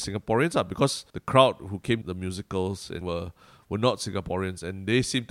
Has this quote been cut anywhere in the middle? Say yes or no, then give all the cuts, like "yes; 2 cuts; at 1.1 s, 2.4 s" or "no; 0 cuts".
yes; 3 cuts; at 1.1 s, 2.0 s, 3.0 s